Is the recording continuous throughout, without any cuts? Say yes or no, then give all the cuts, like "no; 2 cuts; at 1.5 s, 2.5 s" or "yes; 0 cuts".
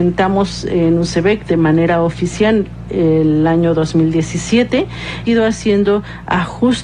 no; 1 cut; at 5.2 s